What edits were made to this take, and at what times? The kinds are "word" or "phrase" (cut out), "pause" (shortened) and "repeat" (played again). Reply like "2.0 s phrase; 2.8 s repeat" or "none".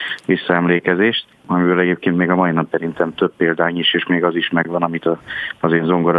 2.7 s word